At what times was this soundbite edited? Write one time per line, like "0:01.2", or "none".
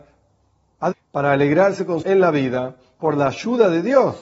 0:00.9
0:02.0